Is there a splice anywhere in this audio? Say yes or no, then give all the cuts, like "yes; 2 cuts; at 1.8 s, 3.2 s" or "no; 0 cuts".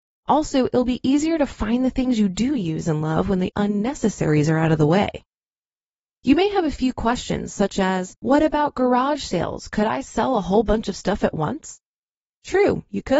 yes; 1 cut; at 8.2 s